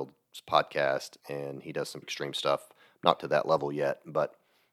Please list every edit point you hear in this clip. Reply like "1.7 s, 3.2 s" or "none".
1.2 s, 2.0 s, 3.2 s